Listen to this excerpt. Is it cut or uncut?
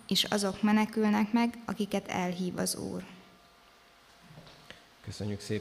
uncut